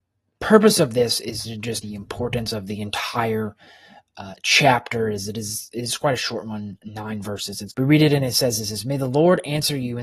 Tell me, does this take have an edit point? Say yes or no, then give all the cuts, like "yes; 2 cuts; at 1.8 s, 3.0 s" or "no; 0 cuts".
yes; 2 cuts; at 1.8 s, 7.7 s